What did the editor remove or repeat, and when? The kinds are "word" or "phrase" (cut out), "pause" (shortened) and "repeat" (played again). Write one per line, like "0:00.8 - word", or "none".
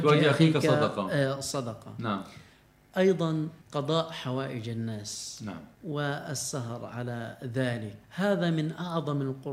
0:03.6 - pause
0:05.7 - pause
0:08.0 - pause